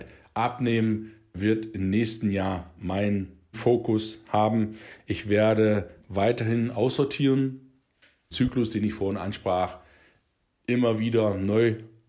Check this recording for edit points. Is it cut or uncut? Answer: cut